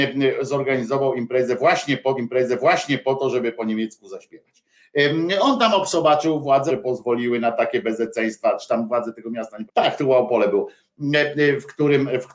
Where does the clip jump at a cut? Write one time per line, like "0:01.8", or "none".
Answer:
0:02.2
0:06.7
0:09.7